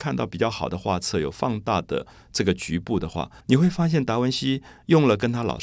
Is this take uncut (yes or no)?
no